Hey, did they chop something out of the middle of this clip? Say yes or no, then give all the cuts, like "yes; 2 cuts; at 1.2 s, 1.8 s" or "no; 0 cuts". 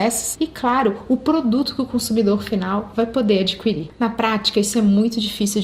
no; 0 cuts